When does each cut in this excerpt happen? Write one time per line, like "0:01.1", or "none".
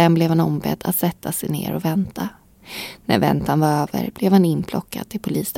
none